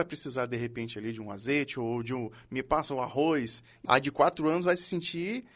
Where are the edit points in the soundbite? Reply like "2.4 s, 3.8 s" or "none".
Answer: 3.8 s